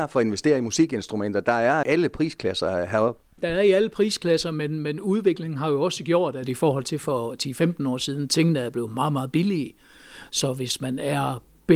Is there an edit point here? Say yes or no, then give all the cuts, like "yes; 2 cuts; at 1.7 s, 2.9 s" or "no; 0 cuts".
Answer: yes; 1 cut; at 1.8 s